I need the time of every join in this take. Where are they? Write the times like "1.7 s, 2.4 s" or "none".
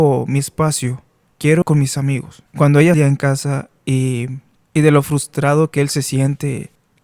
1.6 s, 2.5 s, 2.9 s